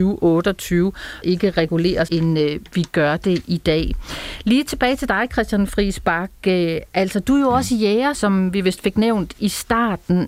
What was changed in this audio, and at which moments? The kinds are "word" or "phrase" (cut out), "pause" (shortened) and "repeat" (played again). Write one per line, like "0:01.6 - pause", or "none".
0:01.2 - phrase
0:02.1 - word
0:08.1 - word